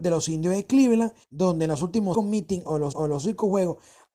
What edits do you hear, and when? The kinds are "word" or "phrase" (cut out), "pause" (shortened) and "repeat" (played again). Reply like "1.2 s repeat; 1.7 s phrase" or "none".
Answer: 1.2 s pause; 2.1 s word; 2.9 s repeat

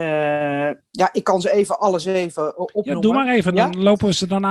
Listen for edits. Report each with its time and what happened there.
none

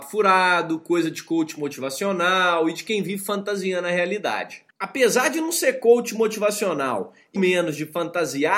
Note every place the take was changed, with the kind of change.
4.7 s pause; 7.4 s word

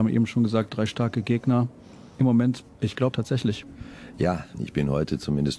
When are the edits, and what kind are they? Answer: 3.1 s phrase

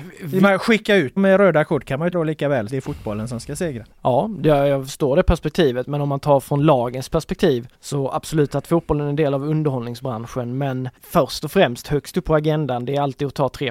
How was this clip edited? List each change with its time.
1.2 s word; 2.1 s word; 2.7 s phrase; 3.9 s pause; 7.7 s pause; 11.0 s pause

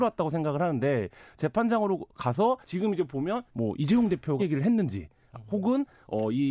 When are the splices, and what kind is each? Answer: 2.6 s pause; 3.5 s word; 4.4 s word

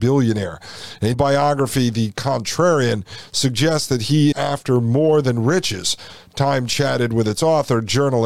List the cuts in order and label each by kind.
1.1 s word; 4.3 s word

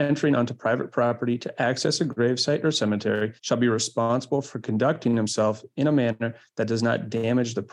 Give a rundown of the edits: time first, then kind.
3.4 s pause

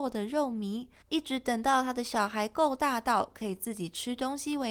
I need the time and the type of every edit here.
1.0 s pause

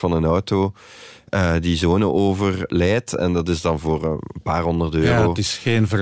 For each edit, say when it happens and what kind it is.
none

